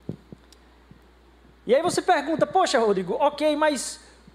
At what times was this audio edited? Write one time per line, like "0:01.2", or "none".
none